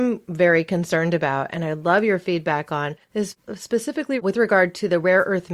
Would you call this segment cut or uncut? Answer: cut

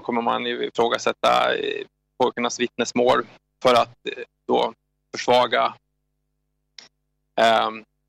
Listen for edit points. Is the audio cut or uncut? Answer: uncut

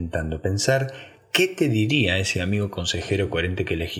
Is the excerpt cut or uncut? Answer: uncut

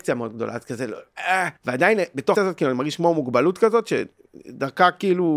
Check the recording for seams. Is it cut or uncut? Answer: cut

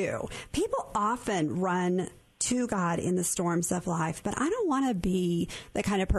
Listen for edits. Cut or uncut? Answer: uncut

